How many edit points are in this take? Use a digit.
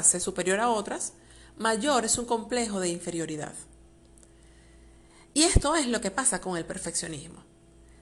0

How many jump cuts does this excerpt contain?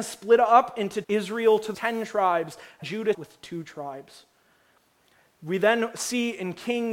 4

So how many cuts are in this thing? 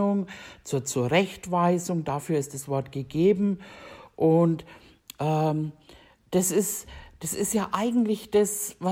0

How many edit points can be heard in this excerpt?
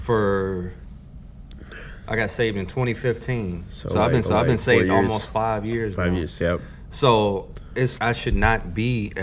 2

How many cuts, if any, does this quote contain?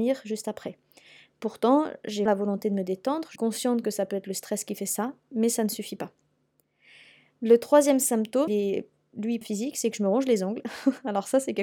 4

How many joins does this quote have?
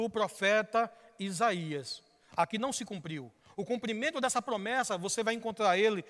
0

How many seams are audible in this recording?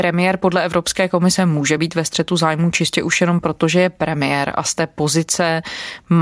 0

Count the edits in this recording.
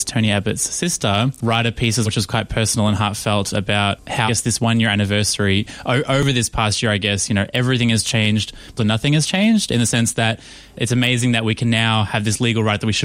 3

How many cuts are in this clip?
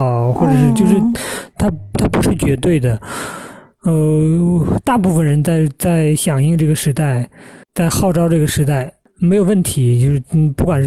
1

